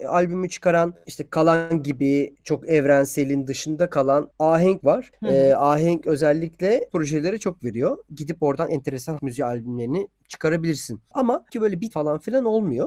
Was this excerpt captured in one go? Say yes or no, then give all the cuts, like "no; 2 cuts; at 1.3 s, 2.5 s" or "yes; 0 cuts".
no; 8 cuts; at 4.8 s, 6.0 s, 6.9 s, 7.6 s, 8.7 s, 9.2 s, 11.5 s, 11.9 s